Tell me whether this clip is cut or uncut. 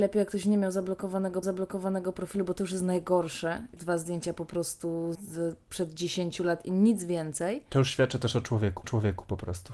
cut